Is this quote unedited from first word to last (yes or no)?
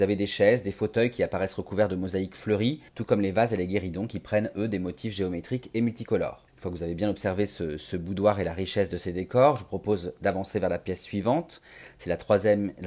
no